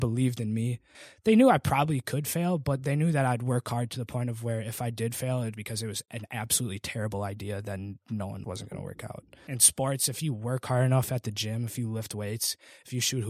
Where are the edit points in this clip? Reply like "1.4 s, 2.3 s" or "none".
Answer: 5.5 s, 8.4 s